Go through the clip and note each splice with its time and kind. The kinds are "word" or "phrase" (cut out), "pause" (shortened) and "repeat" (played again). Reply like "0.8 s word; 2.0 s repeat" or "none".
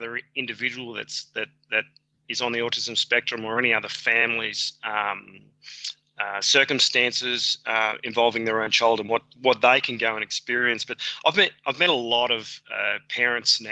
none